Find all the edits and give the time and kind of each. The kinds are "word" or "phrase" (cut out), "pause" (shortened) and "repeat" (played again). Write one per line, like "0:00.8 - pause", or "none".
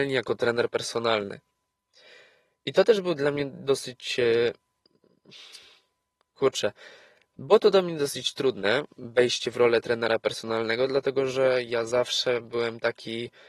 none